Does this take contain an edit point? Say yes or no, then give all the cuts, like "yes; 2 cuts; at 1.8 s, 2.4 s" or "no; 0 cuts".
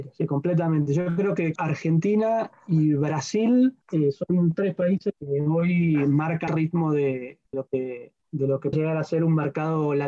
yes; 7 cuts; at 1.6 s, 3.8 s, 5.2 s, 6.5 s, 7.5 s, 8.2 s, 8.7 s